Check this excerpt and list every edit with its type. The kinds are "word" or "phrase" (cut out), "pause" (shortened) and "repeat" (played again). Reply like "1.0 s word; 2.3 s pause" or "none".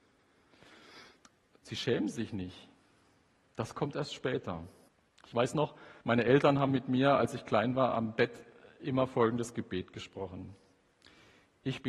4.9 s pause; 6.0 s pause